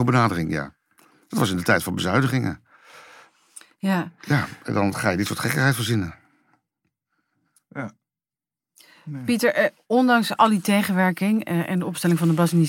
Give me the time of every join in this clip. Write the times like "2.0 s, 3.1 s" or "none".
none